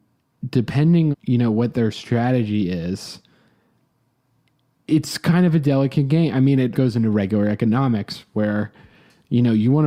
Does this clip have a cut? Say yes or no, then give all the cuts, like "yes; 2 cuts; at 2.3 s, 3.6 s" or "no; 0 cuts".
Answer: yes; 2 cuts; at 1.1 s, 6.7 s